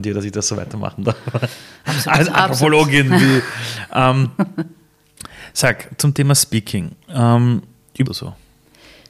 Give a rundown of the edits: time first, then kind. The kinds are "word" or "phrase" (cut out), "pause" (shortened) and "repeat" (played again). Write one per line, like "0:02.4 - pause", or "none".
0:07.0 - pause
0:08.1 - phrase